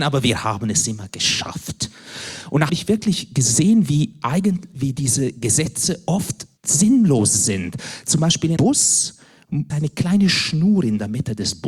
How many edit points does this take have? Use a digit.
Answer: 5